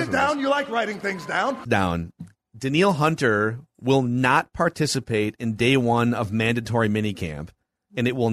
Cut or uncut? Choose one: cut